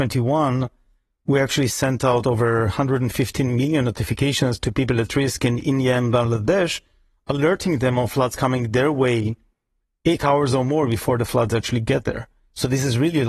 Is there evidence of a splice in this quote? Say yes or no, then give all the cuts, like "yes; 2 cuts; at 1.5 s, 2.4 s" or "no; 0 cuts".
no; 0 cuts